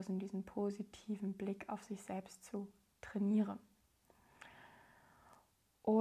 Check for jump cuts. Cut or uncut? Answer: uncut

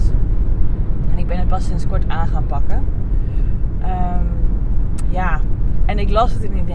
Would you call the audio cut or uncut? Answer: uncut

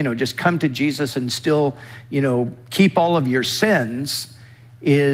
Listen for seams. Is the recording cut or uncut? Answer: uncut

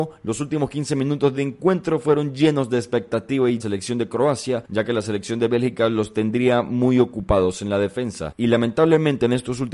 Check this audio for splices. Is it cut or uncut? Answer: cut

